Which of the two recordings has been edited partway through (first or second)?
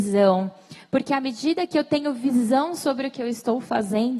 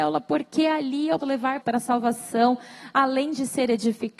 second